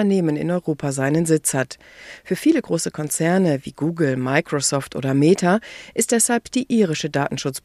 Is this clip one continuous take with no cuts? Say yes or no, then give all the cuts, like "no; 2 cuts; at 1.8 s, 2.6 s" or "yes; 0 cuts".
yes; 0 cuts